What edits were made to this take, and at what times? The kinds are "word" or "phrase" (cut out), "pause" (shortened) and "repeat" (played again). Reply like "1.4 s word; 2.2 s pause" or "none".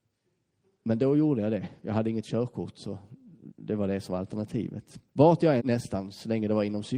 5.1 s pause; 5.6 s phrase